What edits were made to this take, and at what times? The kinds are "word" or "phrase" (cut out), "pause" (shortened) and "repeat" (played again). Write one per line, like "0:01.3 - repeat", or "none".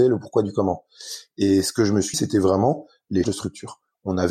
0:02.1 - word
0:03.2 - word